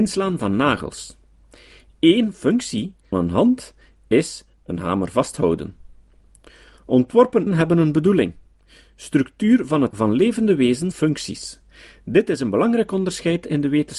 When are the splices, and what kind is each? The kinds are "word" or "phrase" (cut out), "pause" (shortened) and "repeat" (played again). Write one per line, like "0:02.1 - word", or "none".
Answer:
0:03.1 - word
0:07.5 - word
0:09.9 - word
0:10.9 - word